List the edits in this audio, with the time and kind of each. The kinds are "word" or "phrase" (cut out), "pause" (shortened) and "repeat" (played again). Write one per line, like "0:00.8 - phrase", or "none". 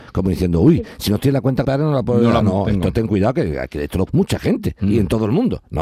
0:01.6 - word
0:02.4 - word
0:04.1 - word